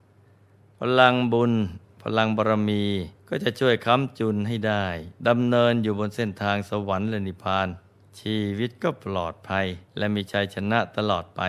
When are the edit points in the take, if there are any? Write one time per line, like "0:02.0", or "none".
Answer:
0:03.2
0:05.2
0:08.0
0:09.9